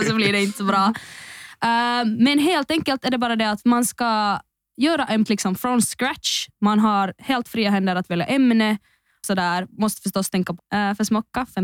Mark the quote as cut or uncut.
cut